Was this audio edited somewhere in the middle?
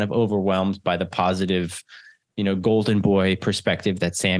no; 0 cuts

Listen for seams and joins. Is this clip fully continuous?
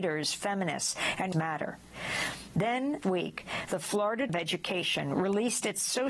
no; 3 cuts; at 1.3 s, 3.0 s, 4.3 s

